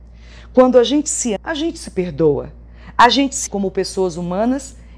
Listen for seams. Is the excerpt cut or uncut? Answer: cut